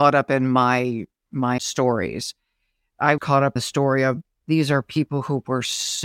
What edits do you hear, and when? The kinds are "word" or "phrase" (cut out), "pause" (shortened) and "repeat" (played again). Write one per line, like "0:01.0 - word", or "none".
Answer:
0:01.6 - word
0:03.2 - word
0:03.6 - word